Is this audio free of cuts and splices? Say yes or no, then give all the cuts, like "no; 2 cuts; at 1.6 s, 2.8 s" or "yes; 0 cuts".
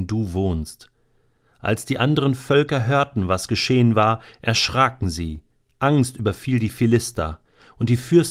yes; 0 cuts